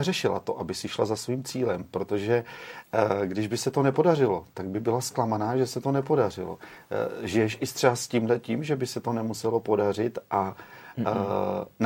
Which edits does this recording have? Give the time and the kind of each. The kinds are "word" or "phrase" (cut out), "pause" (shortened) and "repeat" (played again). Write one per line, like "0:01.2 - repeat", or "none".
none

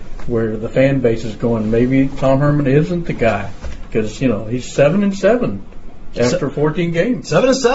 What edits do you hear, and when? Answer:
none

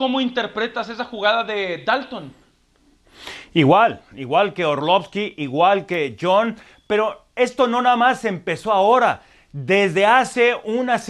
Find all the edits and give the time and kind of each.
none

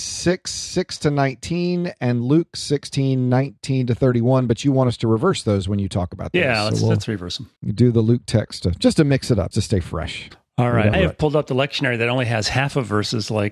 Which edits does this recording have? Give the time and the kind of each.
0:07.6 - pause
0:08.6 - word
0:09.5 - word
0:10.9 - word

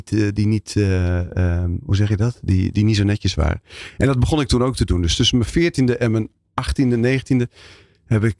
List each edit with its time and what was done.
none

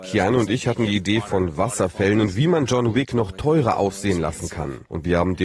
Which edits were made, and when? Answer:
none

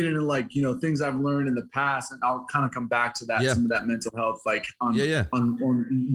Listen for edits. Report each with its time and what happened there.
none

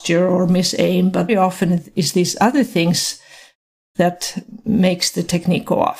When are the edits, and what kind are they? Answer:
0:01.3 - word

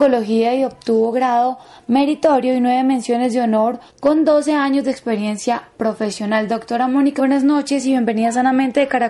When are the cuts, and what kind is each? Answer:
0:03.9 - pause
0:07.2 - word

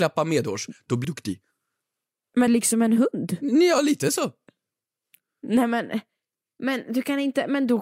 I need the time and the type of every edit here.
0:01.0 - phrase
0:02.5 - phrase

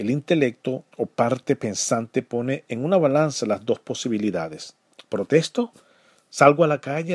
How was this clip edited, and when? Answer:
0:00.9 - pause

